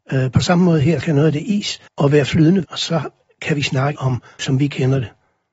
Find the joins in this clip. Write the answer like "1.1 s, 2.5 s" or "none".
1.0 s, 1.9 s, 2.6 s, 4.0 s, 4.4 s